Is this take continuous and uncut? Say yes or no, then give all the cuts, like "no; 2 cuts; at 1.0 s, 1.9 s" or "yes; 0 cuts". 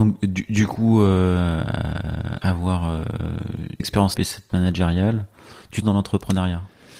no; 5 cuts; at 2.4 s, 3.8 s, 4.1 s, 4.5 s, 5.8 s